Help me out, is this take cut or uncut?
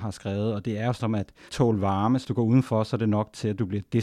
cut